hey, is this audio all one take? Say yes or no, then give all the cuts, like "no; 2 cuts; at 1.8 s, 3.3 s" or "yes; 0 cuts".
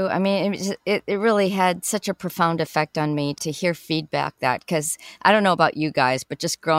no; 1 cut; at 4.4 s